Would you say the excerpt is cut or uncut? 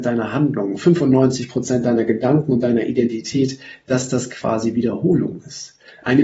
uncut